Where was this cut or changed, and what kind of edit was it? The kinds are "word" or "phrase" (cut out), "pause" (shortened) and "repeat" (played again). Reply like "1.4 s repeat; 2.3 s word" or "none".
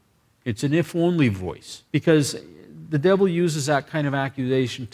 1.9 s pause

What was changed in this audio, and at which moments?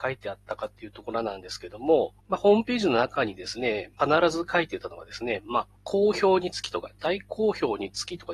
2.2 s pause; 4.0 s phrase; 5.8 s pause

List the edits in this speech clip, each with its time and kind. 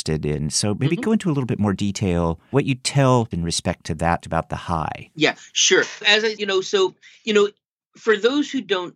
2.5 s word; 3.3 s word; 4.2 s word; 6.0 s word; 6.4 s word

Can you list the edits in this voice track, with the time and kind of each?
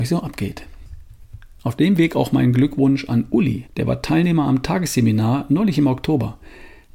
3.7 s pause

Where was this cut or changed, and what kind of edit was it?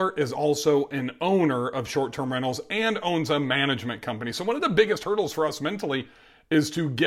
none

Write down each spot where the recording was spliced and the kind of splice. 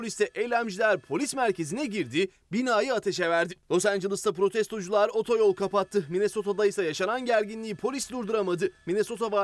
3.6 s pause

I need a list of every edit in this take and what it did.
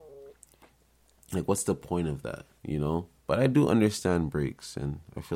2.6 s pause; 3.2 s pause

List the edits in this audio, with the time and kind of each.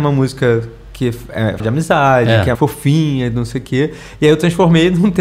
1.6 s word; 2.5 s word

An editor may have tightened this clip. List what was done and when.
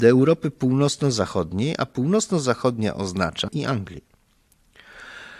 3.5 s word

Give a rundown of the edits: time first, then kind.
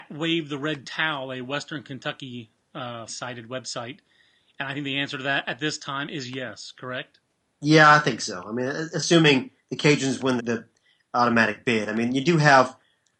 3.1 s word; 10.4 s word

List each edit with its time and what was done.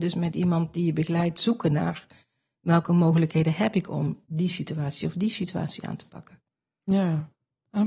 none

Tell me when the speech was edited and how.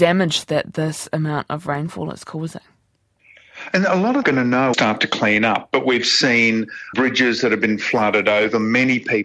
4.2 s phrase; 4.7 s phrase; 6.9 s word

